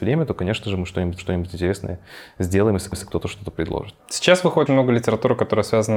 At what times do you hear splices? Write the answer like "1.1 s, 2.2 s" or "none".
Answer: 1.2 s, 2.9 s, 4.7 s